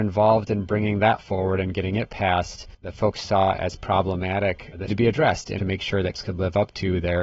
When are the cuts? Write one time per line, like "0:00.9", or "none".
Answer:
0:01.2
0:02.7
0:04.9
0:05.6
0:06.1

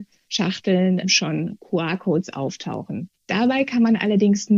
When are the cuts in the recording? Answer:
0:03.1

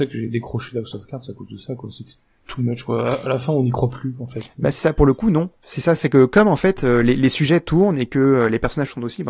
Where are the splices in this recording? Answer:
0:05.6

